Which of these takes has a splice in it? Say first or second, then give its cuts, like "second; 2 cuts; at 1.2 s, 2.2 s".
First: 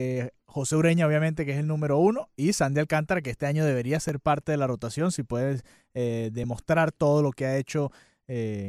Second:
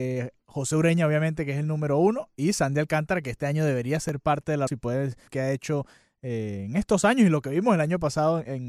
second; 2 cuts; at 4.7 s, 5.3 s